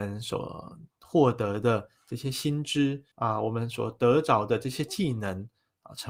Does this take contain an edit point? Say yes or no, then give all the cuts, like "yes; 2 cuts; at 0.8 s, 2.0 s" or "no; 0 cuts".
yes; 1 cut; at 3.1 s